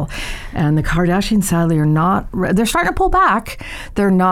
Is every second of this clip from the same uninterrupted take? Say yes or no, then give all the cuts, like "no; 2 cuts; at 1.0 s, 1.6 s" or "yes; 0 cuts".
yes; 0 cuts